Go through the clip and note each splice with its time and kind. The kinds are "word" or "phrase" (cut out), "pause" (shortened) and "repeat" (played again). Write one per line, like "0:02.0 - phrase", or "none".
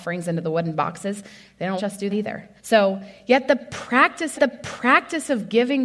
0:01.8 - word
0:02.1 - word
0:02.6 - pause
0:04.4 - repeat